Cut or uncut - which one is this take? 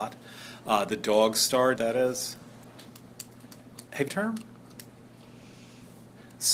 cut